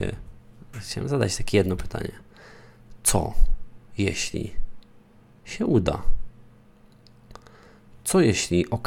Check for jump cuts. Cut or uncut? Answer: uncut